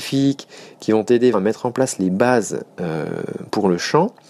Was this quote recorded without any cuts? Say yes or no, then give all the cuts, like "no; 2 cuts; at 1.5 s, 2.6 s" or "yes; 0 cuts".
no; 1 cut; at 1.3 s